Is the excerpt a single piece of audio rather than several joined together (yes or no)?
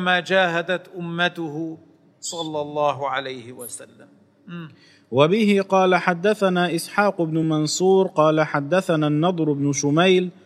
yes